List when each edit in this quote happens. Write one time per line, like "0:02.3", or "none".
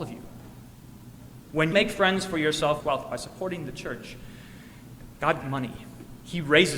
0:01.7
0:02.8
0:05.4